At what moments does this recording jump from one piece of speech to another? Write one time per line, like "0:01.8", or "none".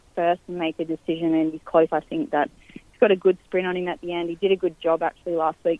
0:01.9

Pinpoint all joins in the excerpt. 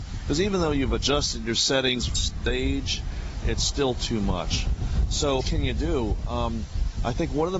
0:02.1
0:03.4
0:05.4

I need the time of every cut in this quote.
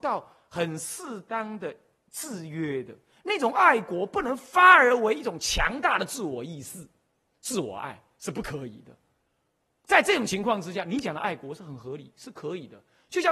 none

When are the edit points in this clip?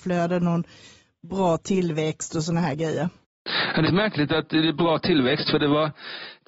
0:03.9

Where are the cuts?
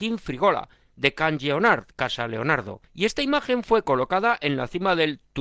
0:01.9
0:02.8

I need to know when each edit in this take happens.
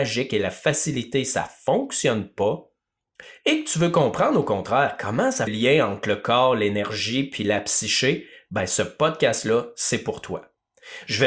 0:05.5

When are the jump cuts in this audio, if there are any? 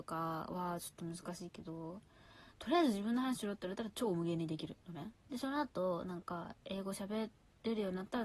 0:04.8
0:05.2

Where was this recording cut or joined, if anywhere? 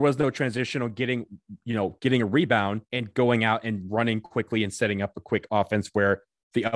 0:02.9

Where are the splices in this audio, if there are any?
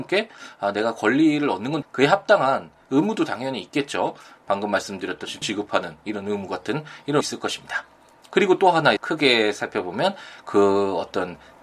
0:01.8
0:05.4
0:07.2
0:09.0

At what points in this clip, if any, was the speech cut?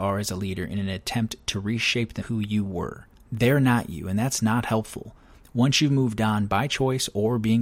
0:02.2

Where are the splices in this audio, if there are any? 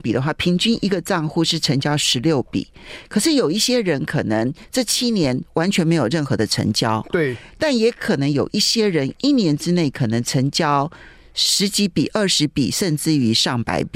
none

